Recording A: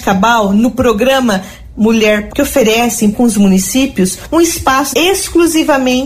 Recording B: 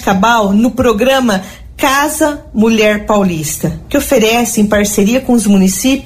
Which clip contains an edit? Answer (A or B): A